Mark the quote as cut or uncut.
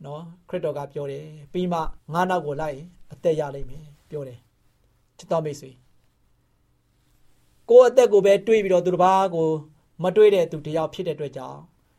cut